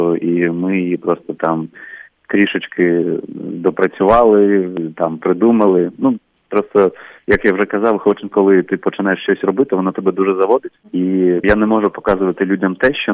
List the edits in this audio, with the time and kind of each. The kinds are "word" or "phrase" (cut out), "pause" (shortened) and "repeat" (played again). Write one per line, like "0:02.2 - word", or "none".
0:11.4 - word